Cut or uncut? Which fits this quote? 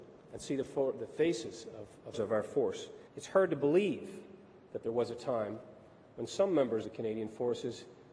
cut